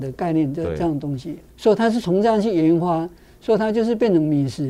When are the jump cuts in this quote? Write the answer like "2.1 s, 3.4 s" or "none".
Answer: 1.5 s